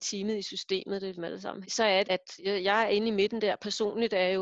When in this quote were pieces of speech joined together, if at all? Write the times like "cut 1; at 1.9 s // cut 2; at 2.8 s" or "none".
cut 1; at 1.2 s // cut 2; at 1.6 s // cut 3; at 2.0 s